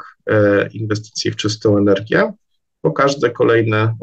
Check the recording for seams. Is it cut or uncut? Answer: uncut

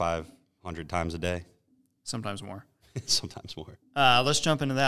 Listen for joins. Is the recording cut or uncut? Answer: uncut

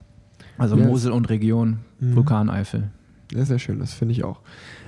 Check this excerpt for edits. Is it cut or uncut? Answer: cut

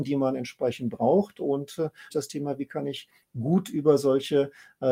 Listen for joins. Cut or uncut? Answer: cut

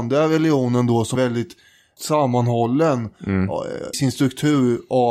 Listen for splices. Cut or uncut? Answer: cut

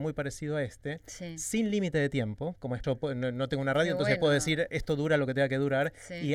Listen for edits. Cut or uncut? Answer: cut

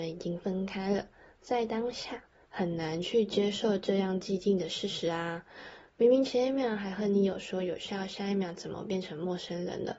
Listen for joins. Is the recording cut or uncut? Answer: uncut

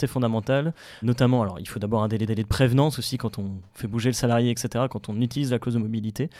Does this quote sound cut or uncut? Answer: cut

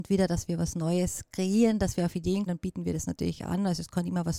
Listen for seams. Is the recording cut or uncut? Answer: cut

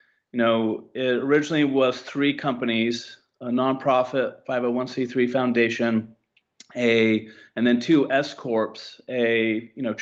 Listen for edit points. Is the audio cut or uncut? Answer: uncut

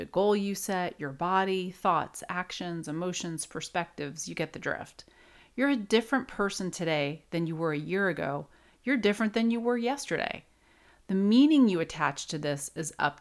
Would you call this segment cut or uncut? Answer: uncut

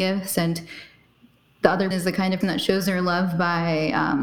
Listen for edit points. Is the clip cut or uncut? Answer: cut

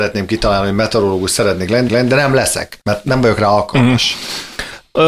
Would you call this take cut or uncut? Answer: cut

